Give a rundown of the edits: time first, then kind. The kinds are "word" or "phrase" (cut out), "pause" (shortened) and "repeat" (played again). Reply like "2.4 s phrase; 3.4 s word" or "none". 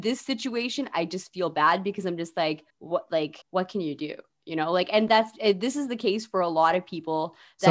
2.7 s pause; 3.4 s pause